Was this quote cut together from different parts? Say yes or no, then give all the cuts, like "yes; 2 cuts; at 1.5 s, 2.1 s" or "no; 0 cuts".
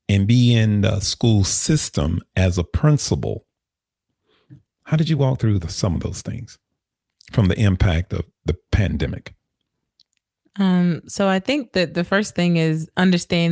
no; 0 cuts